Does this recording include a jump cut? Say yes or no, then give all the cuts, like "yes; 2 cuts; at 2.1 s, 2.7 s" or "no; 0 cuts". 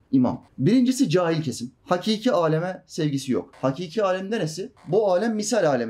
no; 0 cuts